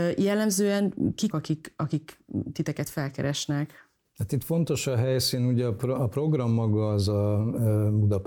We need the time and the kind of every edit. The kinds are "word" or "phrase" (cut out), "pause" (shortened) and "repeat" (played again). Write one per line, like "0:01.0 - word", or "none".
0:01.3 - word

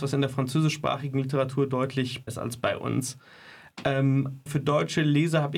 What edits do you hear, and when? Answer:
0:02.3 - word
0:04.5 - word

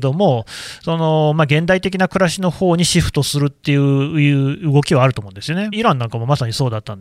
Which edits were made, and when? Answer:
0:05.7 - phrase

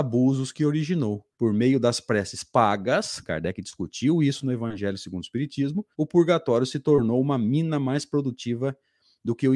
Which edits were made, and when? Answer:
0:01.3 - pause
0:05.9 - pause

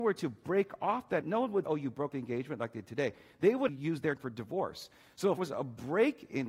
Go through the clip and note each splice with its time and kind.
0:01.2 - word
0:01.7 - word
0:02.1 - word
0:03.7 - word
0:04.2 - word
0:05.4 - word

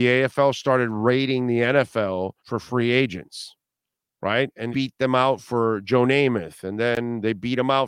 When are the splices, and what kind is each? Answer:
0:02.4 - pause
0:04.0 - pause
0:04.7 - phrase

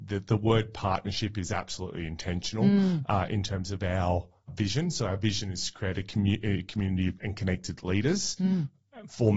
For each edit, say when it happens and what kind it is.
0:04.5 - word
0:07.2 - word

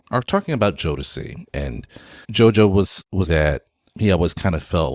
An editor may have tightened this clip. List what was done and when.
0:02.2 - pause
0:03.3 - word

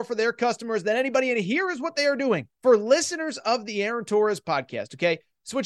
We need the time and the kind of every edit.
0:02.5 - pause

